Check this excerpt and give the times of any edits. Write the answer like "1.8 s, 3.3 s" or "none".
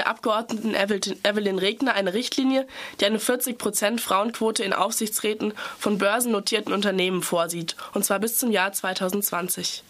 none